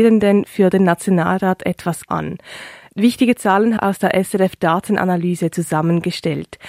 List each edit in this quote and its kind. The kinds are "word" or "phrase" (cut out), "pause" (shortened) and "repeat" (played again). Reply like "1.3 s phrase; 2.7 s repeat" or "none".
2.1 s word; 3.8 s phrase

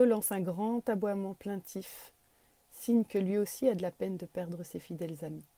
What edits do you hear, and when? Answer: none

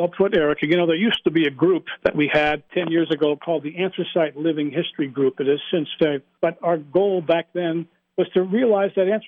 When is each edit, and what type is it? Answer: 6.0 s phrase

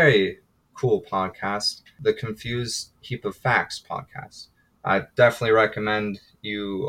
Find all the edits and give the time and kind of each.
none

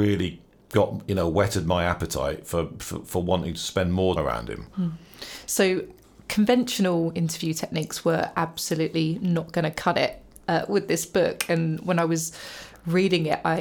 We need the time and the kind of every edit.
4.2 s word; 4.7 s pause

